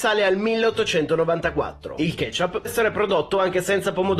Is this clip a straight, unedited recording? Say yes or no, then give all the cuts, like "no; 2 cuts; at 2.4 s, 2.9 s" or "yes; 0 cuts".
no; 1 cut; at 2.6 s